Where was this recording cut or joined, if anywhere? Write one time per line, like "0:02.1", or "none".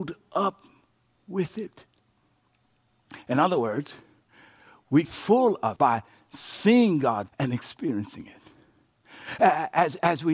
0:05.0
0:05.8
0:07.3